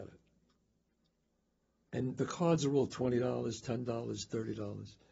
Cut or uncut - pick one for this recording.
uncut